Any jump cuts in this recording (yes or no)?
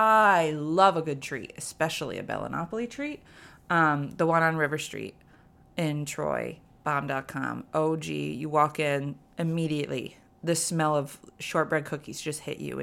no